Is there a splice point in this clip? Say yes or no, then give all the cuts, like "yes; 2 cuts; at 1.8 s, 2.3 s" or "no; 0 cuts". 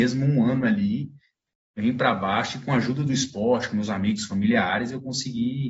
no; 0 cuts